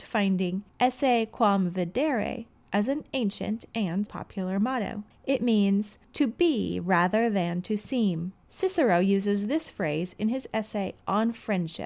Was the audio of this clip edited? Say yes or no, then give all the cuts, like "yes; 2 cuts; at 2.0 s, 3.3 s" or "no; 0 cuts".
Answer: yes; 1 cut; at 4.0 s